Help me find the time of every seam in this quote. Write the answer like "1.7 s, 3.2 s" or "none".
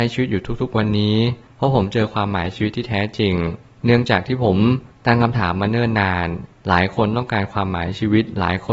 none